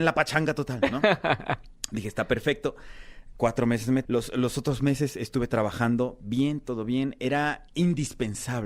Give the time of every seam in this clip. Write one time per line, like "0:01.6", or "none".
0:04.1